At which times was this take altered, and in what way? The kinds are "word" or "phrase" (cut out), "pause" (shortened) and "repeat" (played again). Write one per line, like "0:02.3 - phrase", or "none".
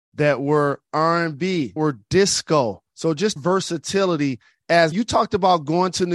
0:01.8 - word
0:02.9 - pause
0:03.4 - phrase
0:04.9 - word